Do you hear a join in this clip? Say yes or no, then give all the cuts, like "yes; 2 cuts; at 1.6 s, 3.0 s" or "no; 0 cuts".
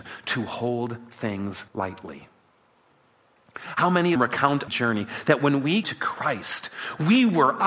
yes; 4 cuts; at 1.7 s, 4.2 s, 4.7 s, 5.8 s